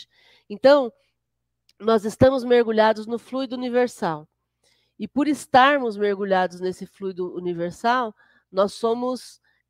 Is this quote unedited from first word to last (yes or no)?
yes